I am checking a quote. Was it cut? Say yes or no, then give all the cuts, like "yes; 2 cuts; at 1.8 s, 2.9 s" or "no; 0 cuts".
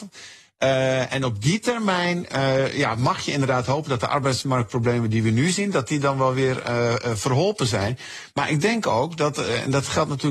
no; 0 cuts